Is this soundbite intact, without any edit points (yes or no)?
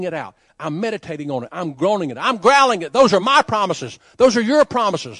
yes